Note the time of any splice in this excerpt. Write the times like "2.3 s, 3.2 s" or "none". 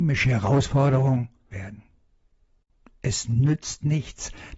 1.5 s